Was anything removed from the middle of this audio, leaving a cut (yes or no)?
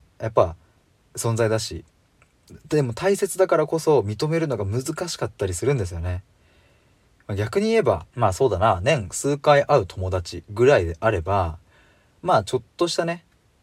yes